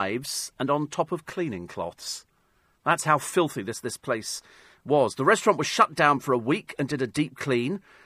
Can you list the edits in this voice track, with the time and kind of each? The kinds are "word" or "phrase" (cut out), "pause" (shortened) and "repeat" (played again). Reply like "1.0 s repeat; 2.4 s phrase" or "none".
none